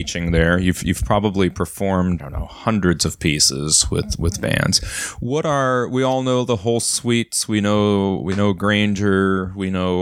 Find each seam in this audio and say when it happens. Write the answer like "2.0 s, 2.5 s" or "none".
2.2 s